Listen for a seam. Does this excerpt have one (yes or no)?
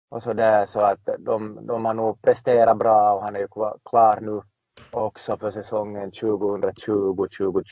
no